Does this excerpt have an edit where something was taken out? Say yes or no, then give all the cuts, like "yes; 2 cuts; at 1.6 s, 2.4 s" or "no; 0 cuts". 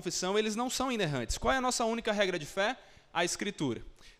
no; 0 cuts